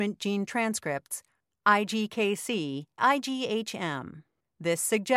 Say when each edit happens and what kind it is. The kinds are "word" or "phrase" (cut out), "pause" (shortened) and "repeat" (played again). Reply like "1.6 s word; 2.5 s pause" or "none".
3.0 s word